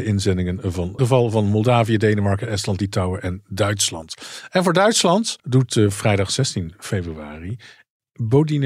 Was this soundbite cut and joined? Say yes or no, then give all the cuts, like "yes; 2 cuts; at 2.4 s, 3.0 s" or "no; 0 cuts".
yes; 2 cuts; at 1.0 s, 5.4 s